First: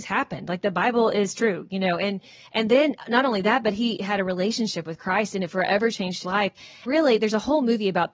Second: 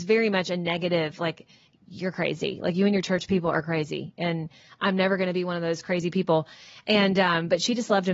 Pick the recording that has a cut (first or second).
first